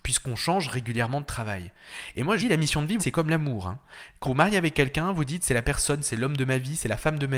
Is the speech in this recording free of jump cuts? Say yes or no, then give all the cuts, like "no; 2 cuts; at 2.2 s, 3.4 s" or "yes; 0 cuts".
no; 3 cuts; at 2.4 s, 3.0 s, 4.2 s